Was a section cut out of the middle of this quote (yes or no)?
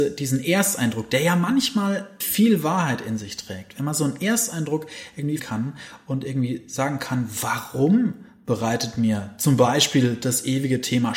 yes